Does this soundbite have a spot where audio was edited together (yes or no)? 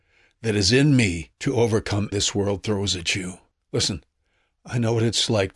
yes